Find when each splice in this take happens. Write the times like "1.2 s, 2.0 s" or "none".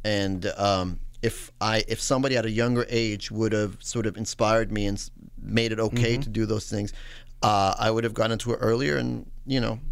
none